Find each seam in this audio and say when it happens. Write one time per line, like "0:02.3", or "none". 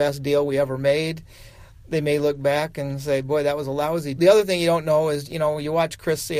0:04.2
0:05.2